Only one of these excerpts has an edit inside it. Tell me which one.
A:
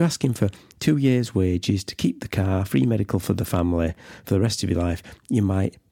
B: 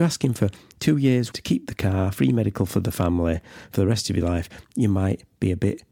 B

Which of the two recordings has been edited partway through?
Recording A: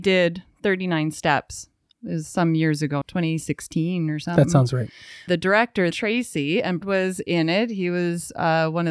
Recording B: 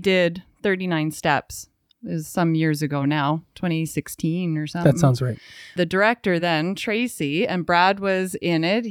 A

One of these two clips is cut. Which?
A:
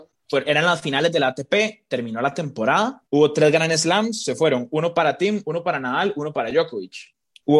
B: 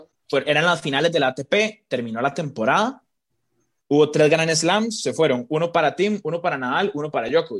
A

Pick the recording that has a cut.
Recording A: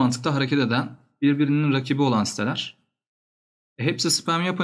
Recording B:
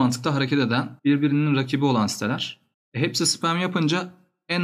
B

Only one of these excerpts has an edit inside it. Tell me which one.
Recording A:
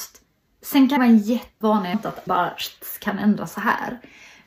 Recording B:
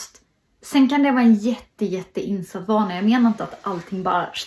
A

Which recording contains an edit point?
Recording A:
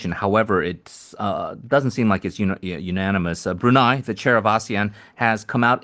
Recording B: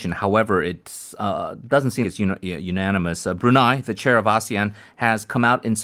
B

